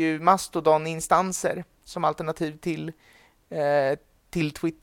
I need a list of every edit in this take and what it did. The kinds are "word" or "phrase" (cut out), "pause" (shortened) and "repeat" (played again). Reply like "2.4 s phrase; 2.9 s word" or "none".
none